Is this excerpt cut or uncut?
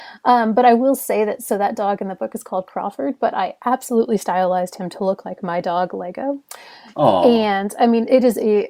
uncut